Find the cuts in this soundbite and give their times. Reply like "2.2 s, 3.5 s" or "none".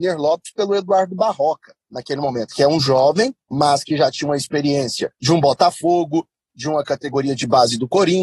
1.8 s, 3.4 s, 5.1 s